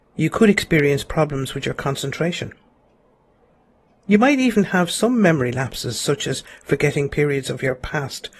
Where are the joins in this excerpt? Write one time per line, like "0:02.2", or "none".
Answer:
none